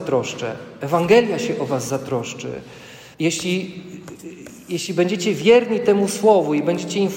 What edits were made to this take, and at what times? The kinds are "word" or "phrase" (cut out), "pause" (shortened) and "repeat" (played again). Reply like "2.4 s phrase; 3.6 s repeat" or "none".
3.1 s pause